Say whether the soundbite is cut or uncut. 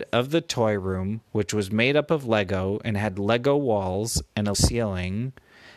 cut